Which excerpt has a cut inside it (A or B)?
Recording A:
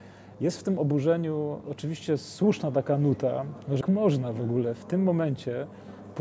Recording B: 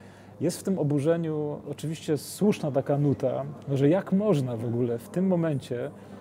A